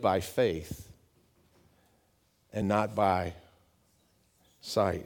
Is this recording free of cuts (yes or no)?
yes